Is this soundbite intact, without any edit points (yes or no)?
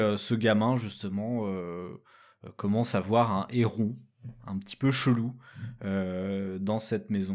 yes